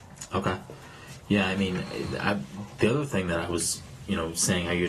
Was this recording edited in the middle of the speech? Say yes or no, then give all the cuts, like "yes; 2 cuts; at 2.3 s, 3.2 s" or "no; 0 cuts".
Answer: no; 0 cuts